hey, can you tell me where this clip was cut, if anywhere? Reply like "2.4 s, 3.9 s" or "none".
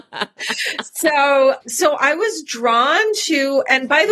1.6 s